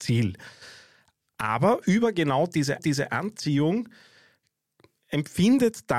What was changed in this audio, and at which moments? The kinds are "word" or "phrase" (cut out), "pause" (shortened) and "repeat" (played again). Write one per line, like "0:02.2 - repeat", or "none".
0:02.8 - repeat